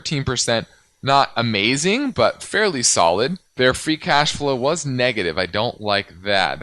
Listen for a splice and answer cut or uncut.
cut